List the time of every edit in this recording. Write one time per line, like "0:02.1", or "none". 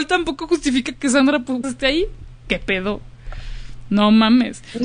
0:01.6